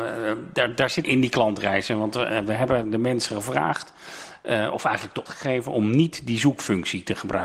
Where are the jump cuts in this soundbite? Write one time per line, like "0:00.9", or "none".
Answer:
0:01.0
0:05.3